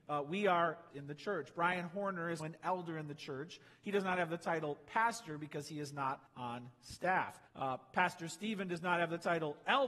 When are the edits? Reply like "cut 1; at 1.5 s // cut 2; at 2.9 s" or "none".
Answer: cut 1; at 0.9 s // cut 2; at 2.4 s // cut 3; at 6.3 s // cut 4; at 7.5 s